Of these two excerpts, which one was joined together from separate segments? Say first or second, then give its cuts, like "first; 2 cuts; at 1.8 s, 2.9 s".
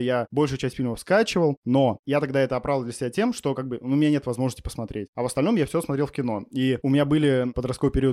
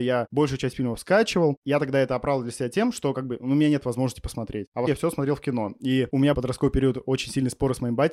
second; 3 cuts; at 1.6 s, 4.9 s, 6.3 s